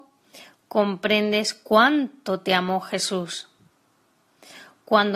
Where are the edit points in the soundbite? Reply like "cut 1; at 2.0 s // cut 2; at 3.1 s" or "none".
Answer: none